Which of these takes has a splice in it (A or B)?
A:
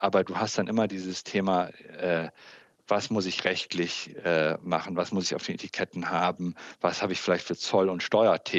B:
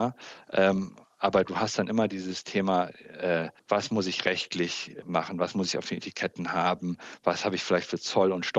B